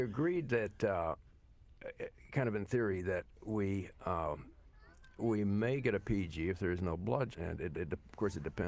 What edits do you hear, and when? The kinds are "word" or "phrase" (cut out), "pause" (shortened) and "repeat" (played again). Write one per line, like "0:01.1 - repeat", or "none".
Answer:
0:07.3 - word
0:07.7 - repeat